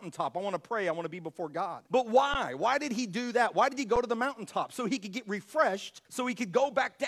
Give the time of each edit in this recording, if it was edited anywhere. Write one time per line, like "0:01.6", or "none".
0:01.9
0:06.0